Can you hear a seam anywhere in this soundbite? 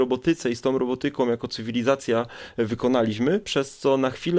no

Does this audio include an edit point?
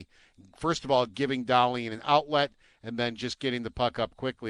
no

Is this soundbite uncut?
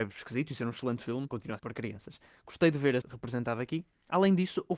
no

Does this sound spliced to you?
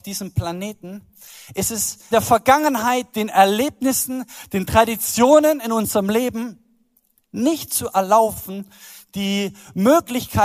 yes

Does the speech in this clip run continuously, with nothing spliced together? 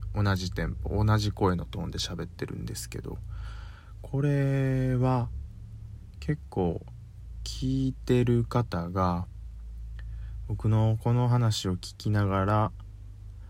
yes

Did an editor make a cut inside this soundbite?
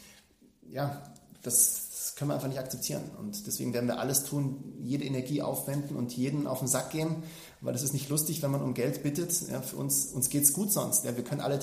no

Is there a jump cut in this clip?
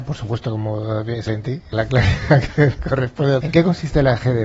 yes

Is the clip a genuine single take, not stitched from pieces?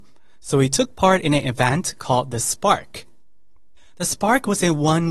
yes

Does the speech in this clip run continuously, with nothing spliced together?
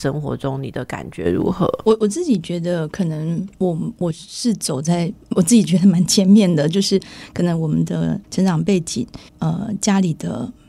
no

